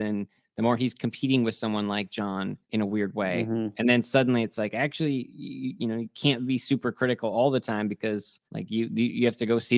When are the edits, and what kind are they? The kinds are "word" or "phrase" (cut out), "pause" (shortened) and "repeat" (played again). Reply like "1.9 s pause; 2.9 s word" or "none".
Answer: 2.6 s pause; 8.5 s pause